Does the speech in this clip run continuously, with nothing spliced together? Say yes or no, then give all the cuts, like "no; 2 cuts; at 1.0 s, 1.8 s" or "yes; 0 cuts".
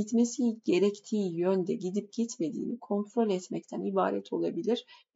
yes; 0 cuts